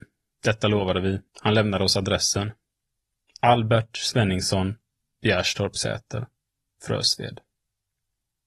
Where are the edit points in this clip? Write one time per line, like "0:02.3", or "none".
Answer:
0:01.3